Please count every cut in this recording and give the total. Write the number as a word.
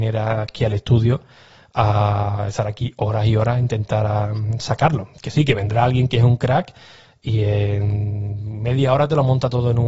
zero